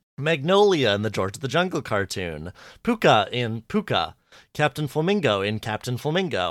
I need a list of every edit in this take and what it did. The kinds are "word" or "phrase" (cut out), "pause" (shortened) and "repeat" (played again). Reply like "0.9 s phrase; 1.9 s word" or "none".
none